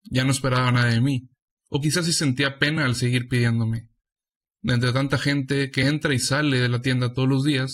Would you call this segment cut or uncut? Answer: uncut